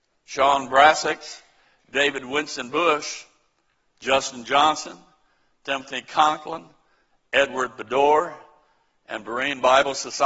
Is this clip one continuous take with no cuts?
yes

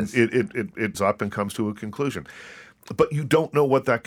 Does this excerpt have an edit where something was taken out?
yes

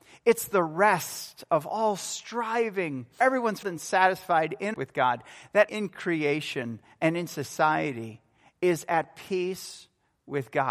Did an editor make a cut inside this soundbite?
yes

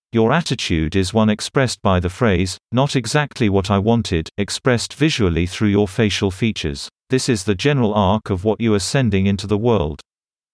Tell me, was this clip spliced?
yes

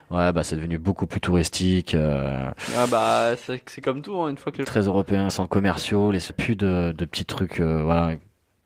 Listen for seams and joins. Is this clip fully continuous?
no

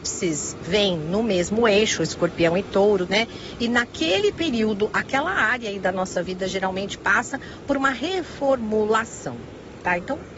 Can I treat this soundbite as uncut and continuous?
no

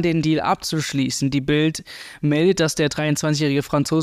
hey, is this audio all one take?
yes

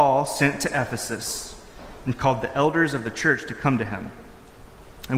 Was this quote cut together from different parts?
no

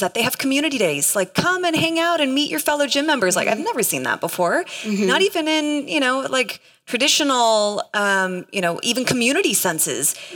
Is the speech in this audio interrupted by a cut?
no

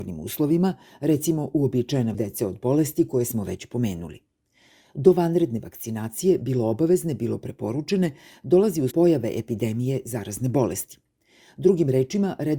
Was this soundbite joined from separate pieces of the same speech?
yes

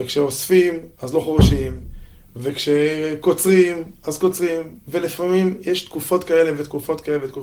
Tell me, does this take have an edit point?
yes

